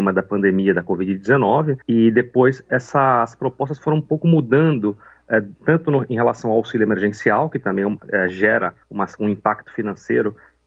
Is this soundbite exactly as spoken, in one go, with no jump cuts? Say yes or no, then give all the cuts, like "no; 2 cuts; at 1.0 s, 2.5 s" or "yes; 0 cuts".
no; 3 cuts; at 1.8 s, 5.6 s, 8.8 s